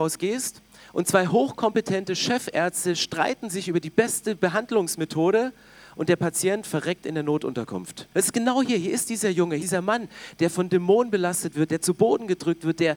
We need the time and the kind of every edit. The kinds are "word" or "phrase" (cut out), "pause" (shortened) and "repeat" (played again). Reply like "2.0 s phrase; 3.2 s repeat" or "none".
8.1 s pause; 9.6 s word